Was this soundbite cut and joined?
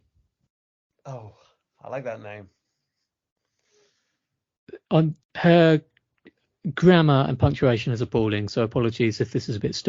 yes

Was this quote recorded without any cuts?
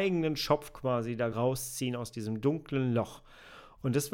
no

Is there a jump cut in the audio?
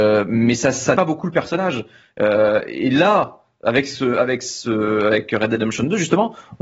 yes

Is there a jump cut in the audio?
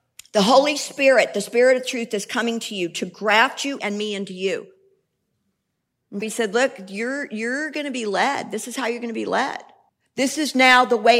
yes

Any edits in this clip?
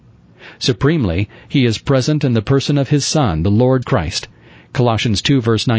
yes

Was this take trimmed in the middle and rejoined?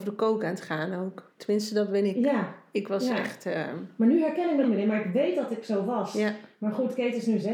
yes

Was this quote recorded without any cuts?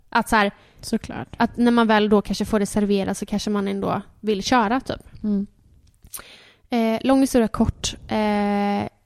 yes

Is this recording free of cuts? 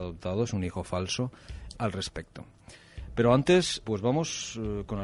no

